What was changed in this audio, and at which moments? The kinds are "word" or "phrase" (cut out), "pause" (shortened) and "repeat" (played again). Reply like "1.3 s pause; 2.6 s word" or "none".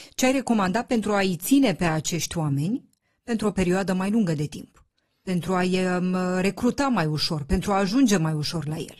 none